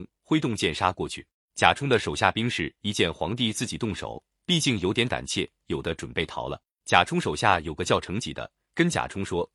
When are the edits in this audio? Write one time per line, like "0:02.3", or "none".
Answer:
0:01.3
0:06.7